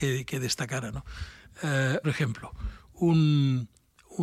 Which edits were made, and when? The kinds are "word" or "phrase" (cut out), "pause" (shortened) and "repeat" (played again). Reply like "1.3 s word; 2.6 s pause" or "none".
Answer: 2.0 s word